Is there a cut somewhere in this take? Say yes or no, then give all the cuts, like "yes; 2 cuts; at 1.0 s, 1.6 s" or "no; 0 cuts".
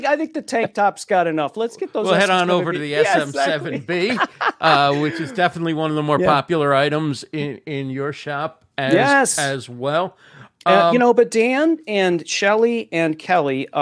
no; 0 cuts